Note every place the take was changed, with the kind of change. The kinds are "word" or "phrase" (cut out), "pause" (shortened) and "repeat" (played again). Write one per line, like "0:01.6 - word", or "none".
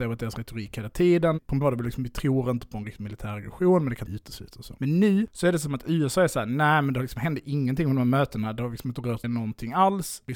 0:01.6 - word
0:04.1 - word
0:09.2 - word